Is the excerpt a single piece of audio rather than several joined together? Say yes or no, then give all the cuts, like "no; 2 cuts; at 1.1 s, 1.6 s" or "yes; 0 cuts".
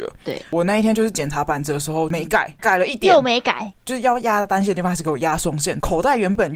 no; 1 cut; at 2.6 s